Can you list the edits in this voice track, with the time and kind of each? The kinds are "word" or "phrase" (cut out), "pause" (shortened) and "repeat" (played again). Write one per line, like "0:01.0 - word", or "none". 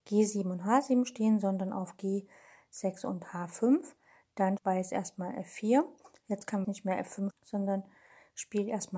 0:04.6 - word
0:06.6 - word
0:07.3 - word